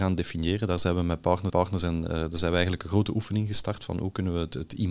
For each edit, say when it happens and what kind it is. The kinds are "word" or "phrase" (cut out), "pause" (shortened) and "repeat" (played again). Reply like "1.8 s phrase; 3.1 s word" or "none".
1.5 s repeat